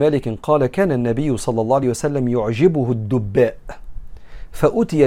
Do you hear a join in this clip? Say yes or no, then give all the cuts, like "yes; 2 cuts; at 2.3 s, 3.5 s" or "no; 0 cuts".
no; 0 cuts